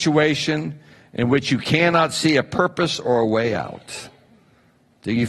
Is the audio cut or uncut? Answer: uncut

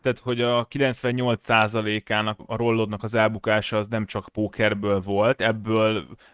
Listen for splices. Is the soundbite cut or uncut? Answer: cut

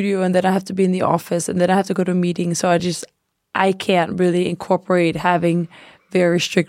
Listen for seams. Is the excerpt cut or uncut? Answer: uncut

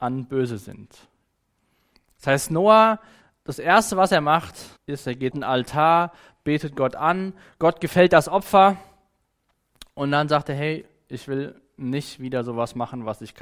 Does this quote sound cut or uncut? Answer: cut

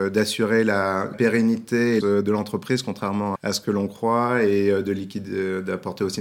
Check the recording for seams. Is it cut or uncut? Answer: cut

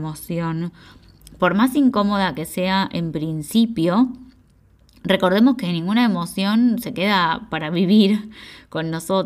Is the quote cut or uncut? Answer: uncut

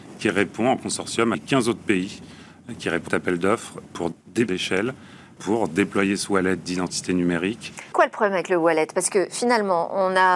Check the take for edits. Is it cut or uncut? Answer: cut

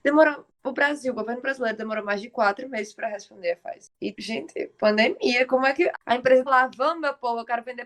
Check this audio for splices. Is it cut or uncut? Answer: cut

